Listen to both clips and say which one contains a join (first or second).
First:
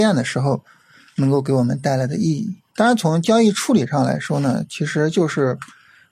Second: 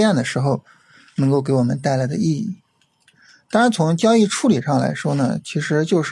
first